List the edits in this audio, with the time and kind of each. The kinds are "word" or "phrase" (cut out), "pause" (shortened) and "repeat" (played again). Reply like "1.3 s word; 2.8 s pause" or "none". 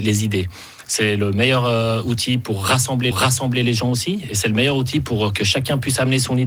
3.1 s repeat